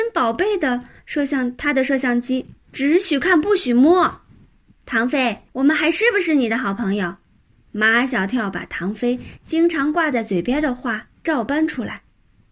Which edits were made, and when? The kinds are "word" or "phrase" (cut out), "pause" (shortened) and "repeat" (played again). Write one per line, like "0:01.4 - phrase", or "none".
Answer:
0:02.6 - pause
0:04.6 - pause
0:05.5 - pause
0:07.5 - pause